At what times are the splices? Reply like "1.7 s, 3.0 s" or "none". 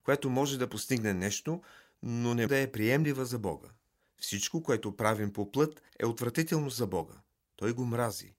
2.5 s